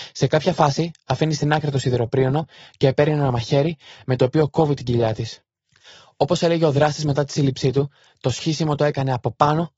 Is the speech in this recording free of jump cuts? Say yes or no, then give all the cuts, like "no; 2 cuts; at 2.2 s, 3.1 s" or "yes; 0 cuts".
yes; 0 cuts